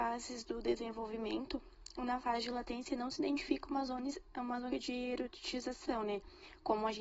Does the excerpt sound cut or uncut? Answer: cut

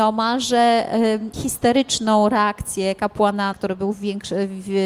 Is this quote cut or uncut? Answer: cut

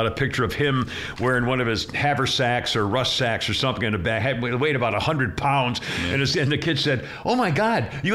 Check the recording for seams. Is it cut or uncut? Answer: uncut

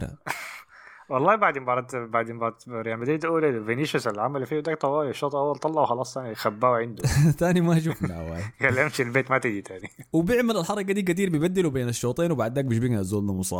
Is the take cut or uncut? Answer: uncut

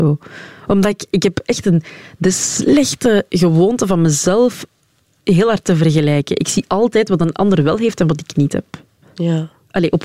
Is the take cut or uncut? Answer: uncut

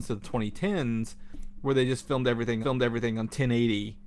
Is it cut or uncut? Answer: cut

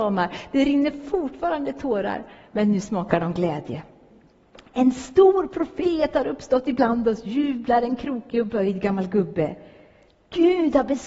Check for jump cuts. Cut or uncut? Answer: uncut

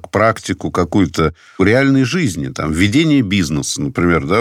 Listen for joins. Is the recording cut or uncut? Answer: uncut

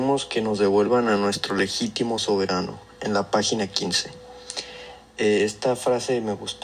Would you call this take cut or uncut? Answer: uncut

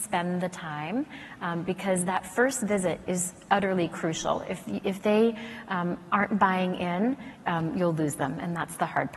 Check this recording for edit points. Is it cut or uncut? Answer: uncut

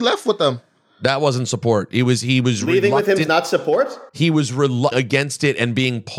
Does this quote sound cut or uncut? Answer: cut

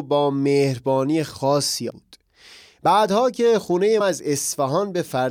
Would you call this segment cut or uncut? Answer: cut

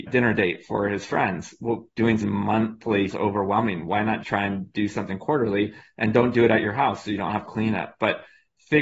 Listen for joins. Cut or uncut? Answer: cut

